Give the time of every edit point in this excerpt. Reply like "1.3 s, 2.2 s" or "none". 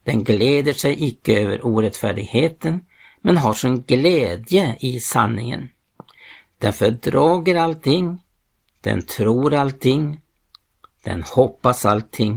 none